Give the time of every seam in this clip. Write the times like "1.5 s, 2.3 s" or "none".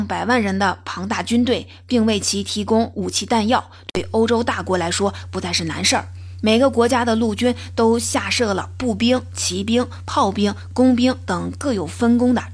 none